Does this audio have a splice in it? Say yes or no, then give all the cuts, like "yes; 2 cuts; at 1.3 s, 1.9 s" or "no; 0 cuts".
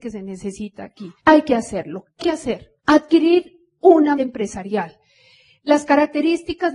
yes; 4 cuts; at 1.2 s, 2.2 s, 2.8 s, 4.1 s